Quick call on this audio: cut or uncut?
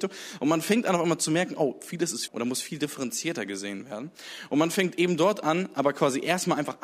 cut